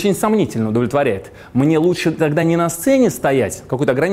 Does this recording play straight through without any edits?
yes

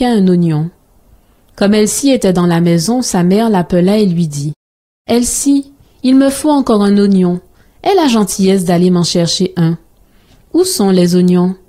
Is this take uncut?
yes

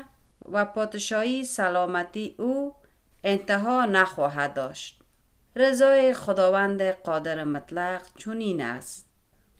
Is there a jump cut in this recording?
no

